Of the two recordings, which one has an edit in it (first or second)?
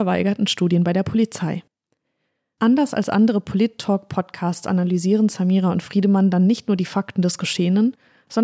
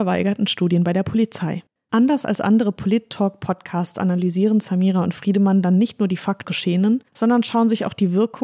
second